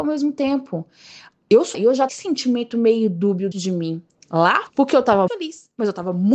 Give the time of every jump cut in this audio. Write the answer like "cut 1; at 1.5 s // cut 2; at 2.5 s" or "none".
cut 1; at 1.7 s // cut 2; at 2.1 s // cut 3; at 3.5 s // cut 4; at 4.7 s // cut 5; at 5.3 s